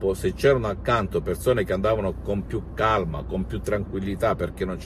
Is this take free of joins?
yes; 0 cuts

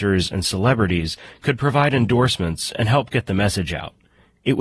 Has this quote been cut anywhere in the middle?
no; 0 cuts

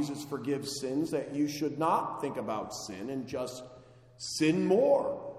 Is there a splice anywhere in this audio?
no; 0 cuts

